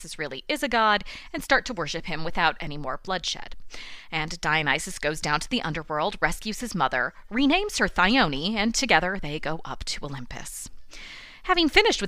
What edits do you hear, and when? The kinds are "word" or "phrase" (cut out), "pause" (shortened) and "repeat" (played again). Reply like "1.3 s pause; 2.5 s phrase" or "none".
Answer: none